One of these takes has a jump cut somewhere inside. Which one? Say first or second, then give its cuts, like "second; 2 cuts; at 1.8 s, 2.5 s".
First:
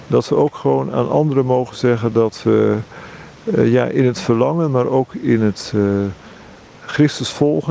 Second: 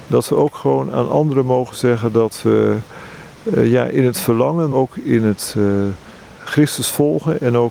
second; 2 cuts; at 4.7 s, 6.4 s